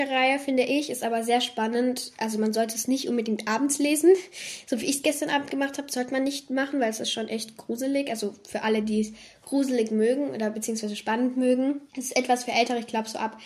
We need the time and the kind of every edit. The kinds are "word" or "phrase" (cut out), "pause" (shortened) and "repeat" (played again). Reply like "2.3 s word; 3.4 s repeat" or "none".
11.9 s pause